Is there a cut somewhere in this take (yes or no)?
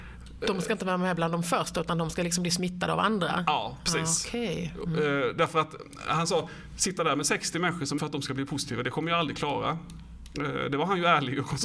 yes